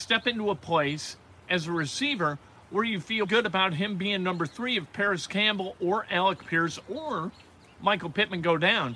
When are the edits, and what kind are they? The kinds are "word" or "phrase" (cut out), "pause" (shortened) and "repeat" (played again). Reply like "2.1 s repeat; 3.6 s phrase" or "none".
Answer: 3.2 s word